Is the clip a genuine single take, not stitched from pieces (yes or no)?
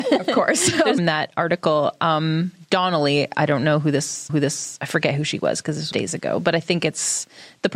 no